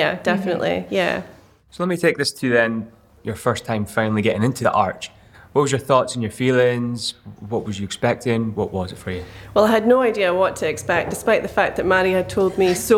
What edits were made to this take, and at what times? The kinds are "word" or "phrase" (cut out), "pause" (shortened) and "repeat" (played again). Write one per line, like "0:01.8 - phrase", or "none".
0:03.2 - word
0:04.6 - word